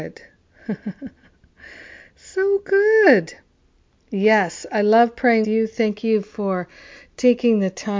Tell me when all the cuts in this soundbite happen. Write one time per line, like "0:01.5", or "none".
0:05.4